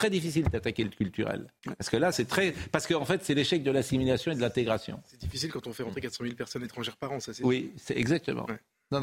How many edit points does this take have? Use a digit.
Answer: 2